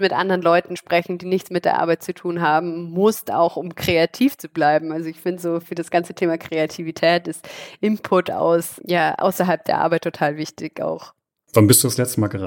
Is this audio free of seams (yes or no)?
yes